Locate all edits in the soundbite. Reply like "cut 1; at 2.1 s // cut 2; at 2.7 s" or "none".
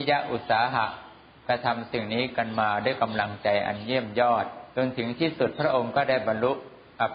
cut 1; at 4.7 s